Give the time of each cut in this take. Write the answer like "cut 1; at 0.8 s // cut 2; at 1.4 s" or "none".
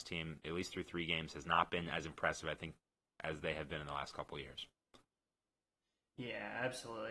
none